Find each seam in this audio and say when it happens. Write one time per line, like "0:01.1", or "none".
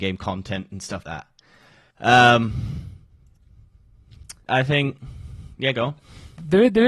0:01.0
0:04.5